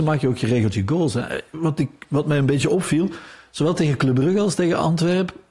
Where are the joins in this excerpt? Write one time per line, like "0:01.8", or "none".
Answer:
none